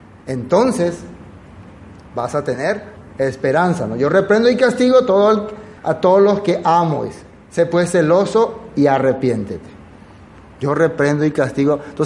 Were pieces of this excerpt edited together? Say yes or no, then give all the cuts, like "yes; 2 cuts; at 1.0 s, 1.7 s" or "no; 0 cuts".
yes; 1 cut; at 5.8 s